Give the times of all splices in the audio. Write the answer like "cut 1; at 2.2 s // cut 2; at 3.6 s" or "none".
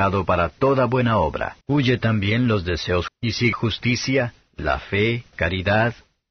cut 1; at 1.6 s // cut 2; at 3.1 s // cut 3; at 3.5 s // cut 4; at 5.3 s